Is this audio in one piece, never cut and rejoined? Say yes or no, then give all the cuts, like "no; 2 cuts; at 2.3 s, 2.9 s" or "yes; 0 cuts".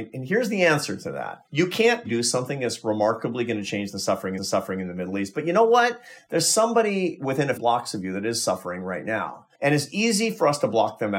no; 5 cuts; at 1.5 s, 2.1 s, 4.4 s, 7.6 s, 9.5 s